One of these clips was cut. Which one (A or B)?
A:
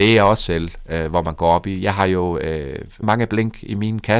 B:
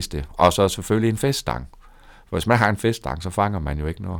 A